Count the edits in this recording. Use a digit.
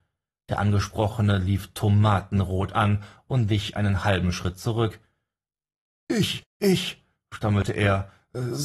0